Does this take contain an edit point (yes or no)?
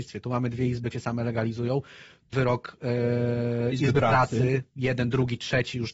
yes